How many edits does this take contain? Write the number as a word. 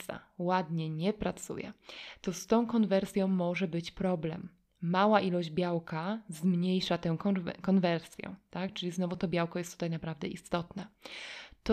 zero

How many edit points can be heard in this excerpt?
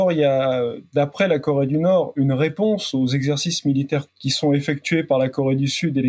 one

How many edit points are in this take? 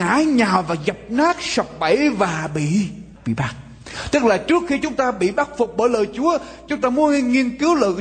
one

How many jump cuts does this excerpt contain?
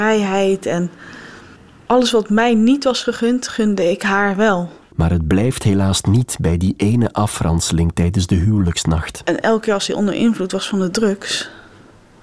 one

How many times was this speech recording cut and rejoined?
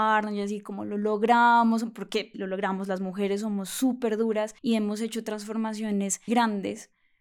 three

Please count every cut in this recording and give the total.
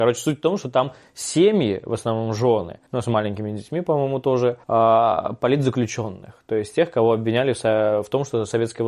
two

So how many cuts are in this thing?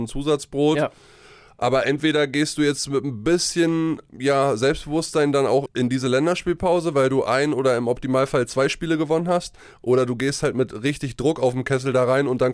zero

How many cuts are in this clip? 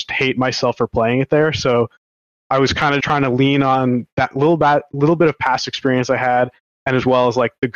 two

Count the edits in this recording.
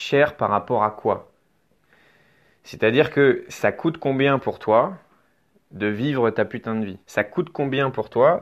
one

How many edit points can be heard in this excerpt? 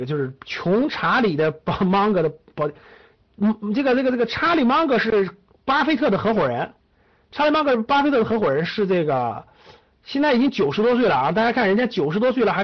zero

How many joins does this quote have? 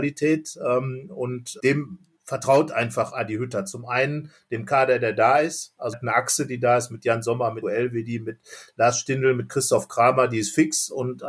four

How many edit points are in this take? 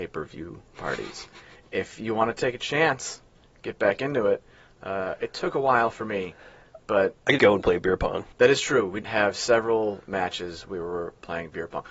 three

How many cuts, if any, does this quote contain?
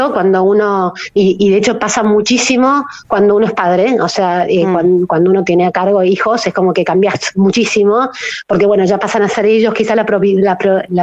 zero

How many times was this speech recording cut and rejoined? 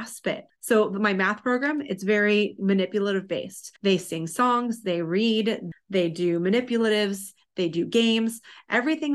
one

